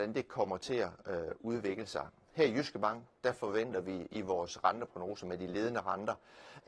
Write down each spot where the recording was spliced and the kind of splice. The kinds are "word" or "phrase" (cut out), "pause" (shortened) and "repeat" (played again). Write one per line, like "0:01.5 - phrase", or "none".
none